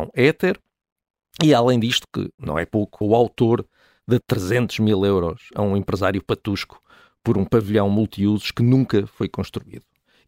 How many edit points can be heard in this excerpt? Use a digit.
2